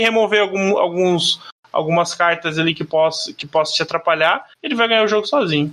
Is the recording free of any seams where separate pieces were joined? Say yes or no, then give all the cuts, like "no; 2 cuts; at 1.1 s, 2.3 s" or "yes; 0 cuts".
yes; 0 cuts